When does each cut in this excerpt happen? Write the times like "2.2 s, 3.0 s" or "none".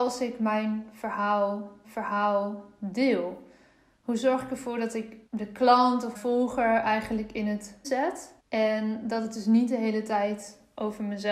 1.8 s, 5.3 s, 6.1 s, 7.8 s, 8.4 s